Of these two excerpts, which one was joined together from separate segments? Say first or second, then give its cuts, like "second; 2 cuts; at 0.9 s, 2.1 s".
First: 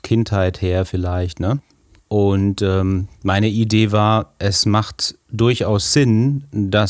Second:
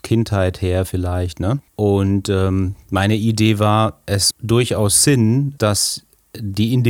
second; 3 cuts; at 1.7 s, 4.3 s, 5.6 s